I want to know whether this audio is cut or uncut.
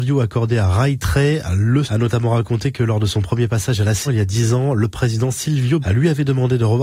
cut